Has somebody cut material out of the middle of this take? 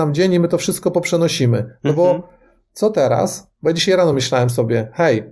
no; 0 cuts

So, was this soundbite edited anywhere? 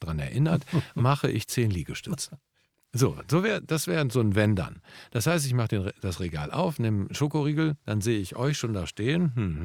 no; 0 cuts

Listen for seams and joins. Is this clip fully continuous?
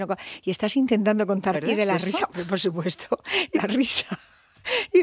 no; 2 cuts; at 1.5 s, 3.5 s

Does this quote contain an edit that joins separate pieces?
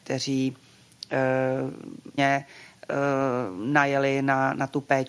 yes; 1 cut; at 2.2 s

